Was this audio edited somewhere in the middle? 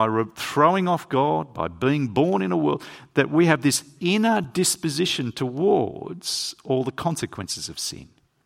no; 0 cuts

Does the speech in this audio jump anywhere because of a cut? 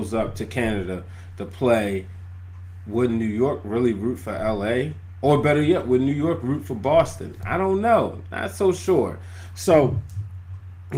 no; 0 cuts

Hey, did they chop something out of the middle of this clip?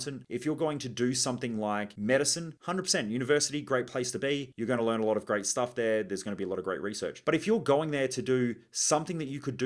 no; 0 cuts

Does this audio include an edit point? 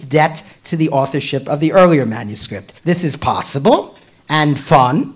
yes; 1 cut; at 2.8 s

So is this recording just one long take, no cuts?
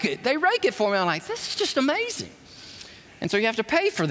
no; 1 cut; at 3.1 s

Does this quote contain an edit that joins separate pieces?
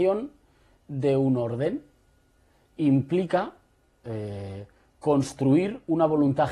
no; 0 cuts

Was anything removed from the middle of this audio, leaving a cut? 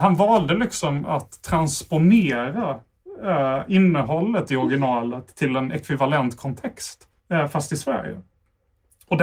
yes; 1 cut; at 7.2 s

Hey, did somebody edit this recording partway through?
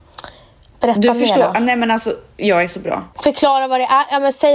yes; 1 cut; at 3.1 s

